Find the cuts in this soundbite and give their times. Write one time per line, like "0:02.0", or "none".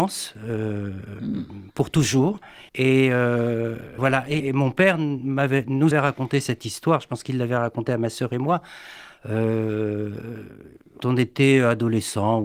0:02.7
0:04.0
0:04.4
0:05.9
0:11.0